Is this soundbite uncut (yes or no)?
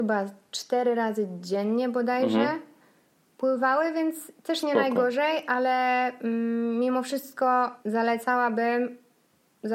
no